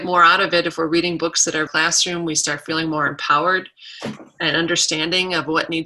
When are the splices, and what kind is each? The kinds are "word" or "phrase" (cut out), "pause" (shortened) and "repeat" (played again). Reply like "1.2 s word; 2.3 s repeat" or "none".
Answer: 1.7 s phrase